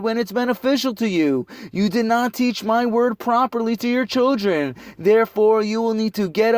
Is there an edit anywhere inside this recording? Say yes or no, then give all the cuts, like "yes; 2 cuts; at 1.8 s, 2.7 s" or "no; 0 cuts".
no; 0 cuts